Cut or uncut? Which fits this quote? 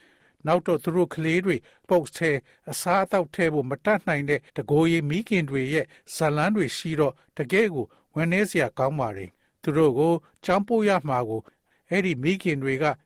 cut